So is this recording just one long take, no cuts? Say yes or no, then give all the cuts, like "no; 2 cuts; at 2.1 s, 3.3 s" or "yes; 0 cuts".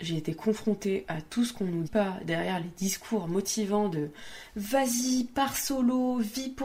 no; 1 cut; at 1.8 s